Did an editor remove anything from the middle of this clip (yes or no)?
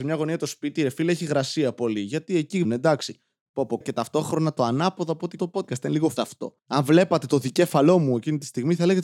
yes